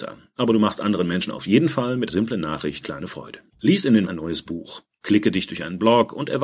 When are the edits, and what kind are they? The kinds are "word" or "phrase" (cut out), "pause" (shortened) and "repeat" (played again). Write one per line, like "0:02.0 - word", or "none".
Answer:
0:02.1 - word
0:02.8 - word
0:03.5 - pause
0:04.1 - word